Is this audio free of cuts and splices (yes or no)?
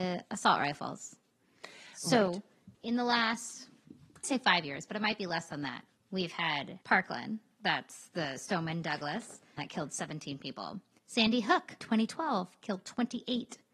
no